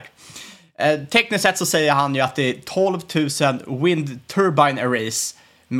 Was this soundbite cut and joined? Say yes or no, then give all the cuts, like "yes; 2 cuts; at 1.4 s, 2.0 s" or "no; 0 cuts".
no; 0 cuts